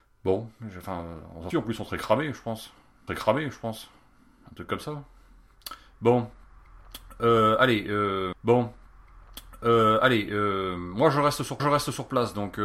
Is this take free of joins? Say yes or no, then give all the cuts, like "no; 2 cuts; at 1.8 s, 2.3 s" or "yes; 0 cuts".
no; 4 cuts; at 1.5 s, 3.1 s, 8.3 s, 11.6 s